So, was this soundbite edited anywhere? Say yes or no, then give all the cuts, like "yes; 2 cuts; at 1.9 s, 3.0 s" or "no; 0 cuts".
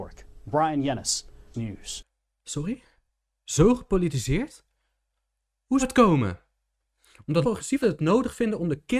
yes; 4 cuts; at 1.5 s, 5.8 s, 7.4 s, 7.8 s